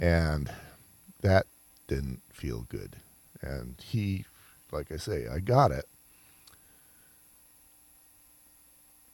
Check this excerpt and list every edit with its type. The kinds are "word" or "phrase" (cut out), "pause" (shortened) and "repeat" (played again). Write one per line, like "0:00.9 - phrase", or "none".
none